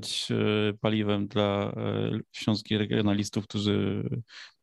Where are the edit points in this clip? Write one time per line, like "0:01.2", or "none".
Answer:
none